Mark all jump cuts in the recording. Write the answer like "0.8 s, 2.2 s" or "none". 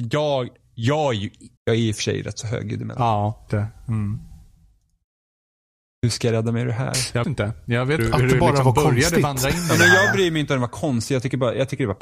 1.6 s, 3.5 s, 7.2 s, 8.0 s